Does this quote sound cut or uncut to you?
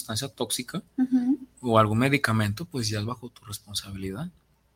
uncut